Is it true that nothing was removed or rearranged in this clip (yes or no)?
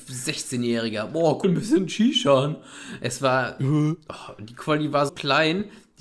no